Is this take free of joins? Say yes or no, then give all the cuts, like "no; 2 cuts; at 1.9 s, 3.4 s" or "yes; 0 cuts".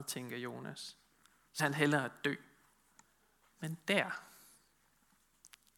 no; 2 cuts; at 1.6 s, 3.0 s